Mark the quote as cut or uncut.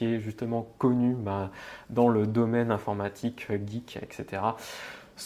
uncut